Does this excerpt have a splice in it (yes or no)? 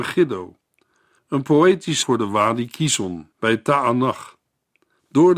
yes